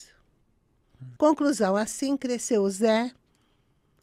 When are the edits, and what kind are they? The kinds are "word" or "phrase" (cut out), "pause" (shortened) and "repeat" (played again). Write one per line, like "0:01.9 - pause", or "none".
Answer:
0:01.2 - pause